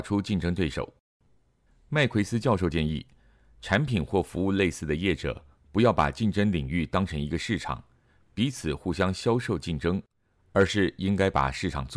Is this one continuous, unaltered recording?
yes; 0 cuts

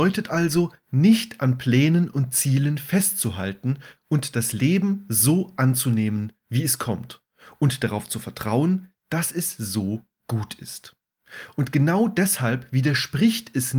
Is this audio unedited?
yes; 0 cuts

